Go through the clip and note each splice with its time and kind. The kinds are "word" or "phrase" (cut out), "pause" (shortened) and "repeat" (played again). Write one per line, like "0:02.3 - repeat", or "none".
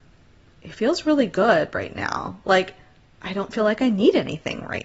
none